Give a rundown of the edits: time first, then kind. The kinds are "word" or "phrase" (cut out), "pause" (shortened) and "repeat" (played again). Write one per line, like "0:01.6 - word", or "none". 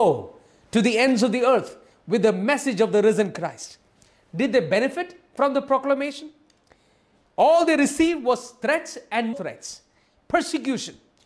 0:09.3 - word